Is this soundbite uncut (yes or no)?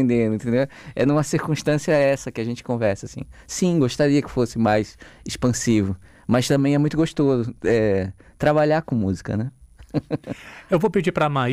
yes